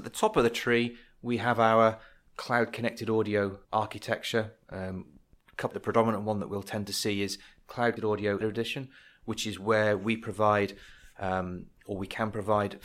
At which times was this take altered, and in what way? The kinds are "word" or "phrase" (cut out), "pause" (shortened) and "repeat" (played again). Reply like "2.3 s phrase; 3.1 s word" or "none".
3.6 s pause; 5.7 s phrase; 8.0 s word; 8.4 s phrase